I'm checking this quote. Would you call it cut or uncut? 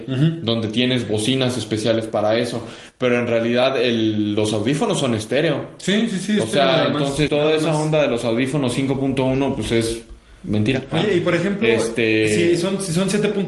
cut